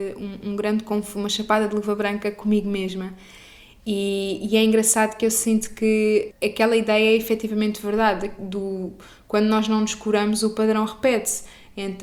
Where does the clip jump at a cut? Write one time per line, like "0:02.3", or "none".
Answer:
0:06.3